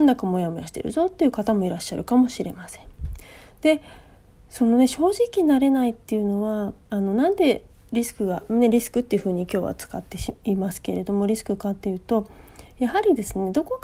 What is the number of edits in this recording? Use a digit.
0